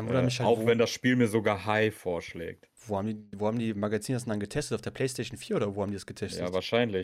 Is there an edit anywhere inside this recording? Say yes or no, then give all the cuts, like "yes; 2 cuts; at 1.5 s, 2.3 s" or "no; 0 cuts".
no; 0 cuts